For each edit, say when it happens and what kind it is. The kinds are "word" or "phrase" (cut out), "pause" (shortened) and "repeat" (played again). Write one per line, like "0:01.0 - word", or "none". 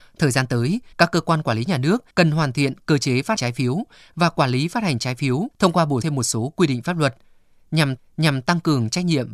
0:00.9 - pause
0:02.1 - pause
0:03.4 - word
0:05.5 - pause
0:06.0 - word
0:08.0 - repeat